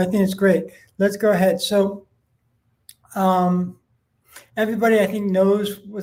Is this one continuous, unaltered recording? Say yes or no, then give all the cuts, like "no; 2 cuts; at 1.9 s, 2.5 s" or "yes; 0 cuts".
yes; 0 cuts